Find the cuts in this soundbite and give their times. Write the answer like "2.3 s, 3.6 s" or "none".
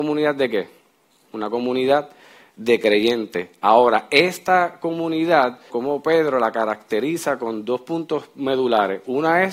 5.7 s